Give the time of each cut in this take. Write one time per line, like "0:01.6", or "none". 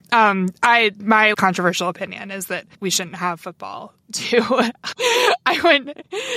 0:01.3
0:02.7
0:04.9